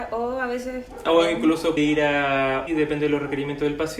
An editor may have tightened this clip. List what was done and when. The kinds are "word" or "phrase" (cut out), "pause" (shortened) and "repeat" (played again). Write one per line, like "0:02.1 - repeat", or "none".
0:01.8 - word
0:02.7 - word